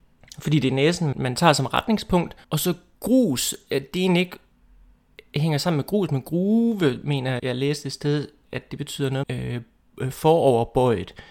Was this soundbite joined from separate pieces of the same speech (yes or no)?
yes